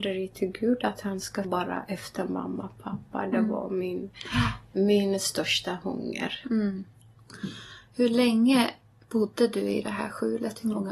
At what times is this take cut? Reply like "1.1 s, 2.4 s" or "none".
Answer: 1.4 s